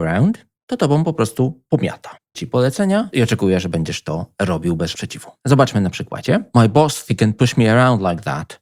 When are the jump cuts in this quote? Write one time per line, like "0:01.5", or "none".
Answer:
0:02.3
0:04.9
0:07.1